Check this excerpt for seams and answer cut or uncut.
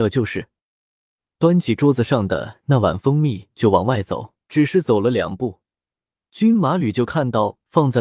cut